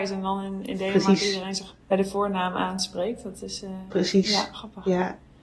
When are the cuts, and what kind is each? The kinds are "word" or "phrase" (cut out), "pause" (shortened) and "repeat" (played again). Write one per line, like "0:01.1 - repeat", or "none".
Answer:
0:01.8 - pause